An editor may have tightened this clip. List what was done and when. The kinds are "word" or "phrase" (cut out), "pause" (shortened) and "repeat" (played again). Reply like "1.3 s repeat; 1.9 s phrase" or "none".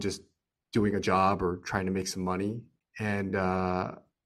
none